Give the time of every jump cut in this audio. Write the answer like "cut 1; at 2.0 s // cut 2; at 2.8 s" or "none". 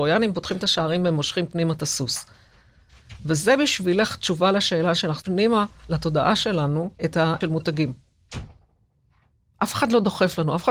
cut 1; at 5.2 s // cut 2; at 6.9 s // cut 3; at 7.4 s